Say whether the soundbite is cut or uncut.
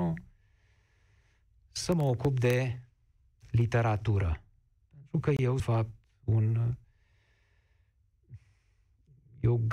cut